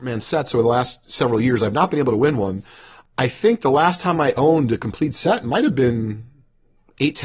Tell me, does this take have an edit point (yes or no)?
no